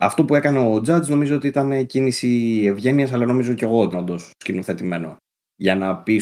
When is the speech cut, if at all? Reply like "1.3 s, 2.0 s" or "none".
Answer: 3.9 s